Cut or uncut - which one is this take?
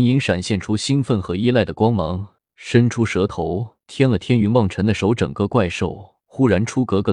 cut